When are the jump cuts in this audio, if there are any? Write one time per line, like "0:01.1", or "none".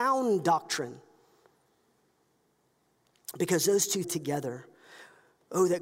0:04.0